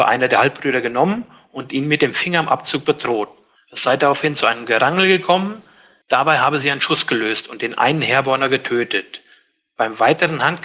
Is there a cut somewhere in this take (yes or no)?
no